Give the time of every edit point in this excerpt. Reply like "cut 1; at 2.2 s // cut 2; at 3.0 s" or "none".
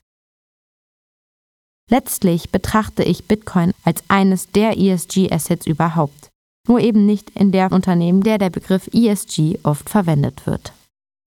cut 1; at 6.5 s // cut 2; at 7.7 s // cut 3; at 8.2 s